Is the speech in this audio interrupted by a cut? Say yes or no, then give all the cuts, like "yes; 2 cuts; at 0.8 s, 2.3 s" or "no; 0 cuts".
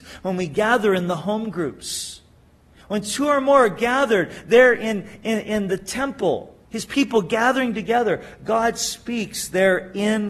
yes; 1 cut; at 6.6 s